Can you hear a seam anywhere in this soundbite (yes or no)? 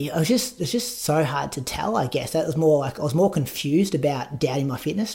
no